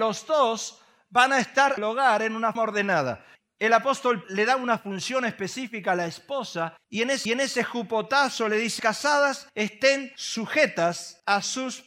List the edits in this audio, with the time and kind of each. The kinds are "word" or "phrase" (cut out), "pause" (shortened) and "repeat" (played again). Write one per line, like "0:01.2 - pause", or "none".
0:01.8 - word
0:02.6 - word
0:04.2 - word
0:06.8 - pause
0:07.3 - repeat
0:08.8 - word

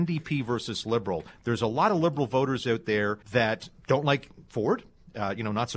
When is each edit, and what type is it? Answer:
0:03.2 - pause

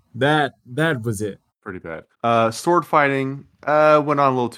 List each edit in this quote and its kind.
0:01.5 - pause
0:02.1 - pause
0:03.5 - pause

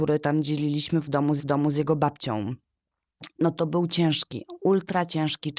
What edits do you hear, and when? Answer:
0:01.4 - repeat

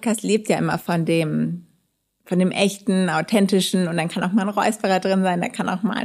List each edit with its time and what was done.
none

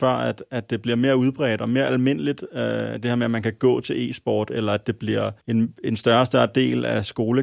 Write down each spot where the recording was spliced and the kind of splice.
0:05.4 - pause

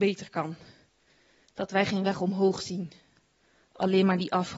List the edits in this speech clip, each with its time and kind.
none

